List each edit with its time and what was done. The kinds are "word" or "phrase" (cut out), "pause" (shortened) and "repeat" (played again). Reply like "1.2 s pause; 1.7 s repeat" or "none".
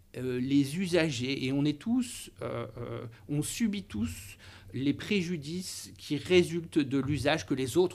none